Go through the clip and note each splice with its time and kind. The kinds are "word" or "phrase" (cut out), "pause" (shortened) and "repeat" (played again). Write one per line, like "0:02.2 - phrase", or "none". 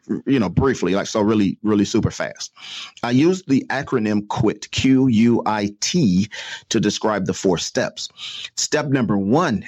none